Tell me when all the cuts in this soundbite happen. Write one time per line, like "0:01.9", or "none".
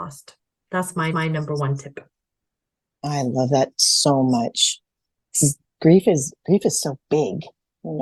0:01.1
0:03.7